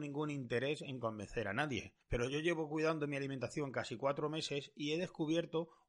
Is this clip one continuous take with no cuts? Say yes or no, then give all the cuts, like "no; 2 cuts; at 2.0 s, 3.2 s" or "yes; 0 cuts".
no; 1 cut; at 2.0 s